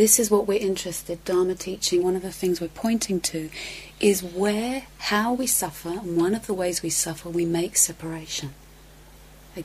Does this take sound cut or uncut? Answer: cut